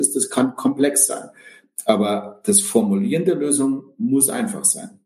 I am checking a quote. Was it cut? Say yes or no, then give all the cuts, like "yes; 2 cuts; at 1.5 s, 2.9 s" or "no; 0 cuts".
no; 0 cuts